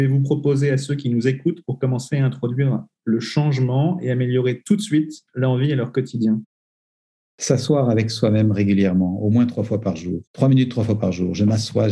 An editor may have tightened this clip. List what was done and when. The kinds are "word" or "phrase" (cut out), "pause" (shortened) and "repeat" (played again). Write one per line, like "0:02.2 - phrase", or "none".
0:10.3 - pause